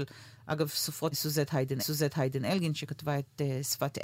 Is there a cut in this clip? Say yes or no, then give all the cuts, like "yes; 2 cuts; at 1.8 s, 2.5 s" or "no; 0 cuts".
yes; 2 cuts; at 1.1 s, 1.8 s